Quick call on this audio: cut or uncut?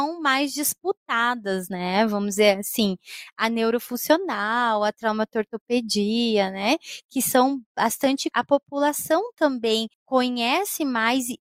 cut